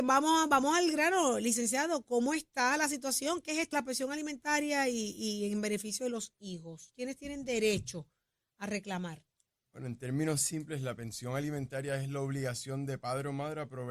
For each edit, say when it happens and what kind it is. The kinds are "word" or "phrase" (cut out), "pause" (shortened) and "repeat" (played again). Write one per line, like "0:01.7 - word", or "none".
0:03.7 - word